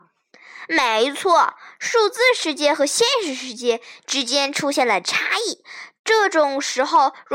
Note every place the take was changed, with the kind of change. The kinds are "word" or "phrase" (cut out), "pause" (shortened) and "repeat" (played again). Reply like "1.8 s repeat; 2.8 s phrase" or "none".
6.0 s pause